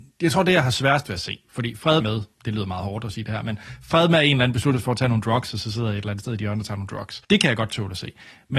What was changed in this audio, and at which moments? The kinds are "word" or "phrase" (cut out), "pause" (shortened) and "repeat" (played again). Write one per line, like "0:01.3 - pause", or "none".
0:02.0 - word
0:07.2 - pause